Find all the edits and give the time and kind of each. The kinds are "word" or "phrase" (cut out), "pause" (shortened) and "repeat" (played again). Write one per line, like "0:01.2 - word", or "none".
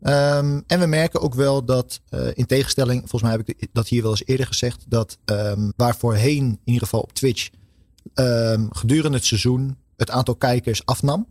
0:05.7 - word